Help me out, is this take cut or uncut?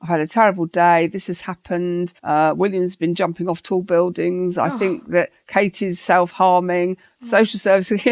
cut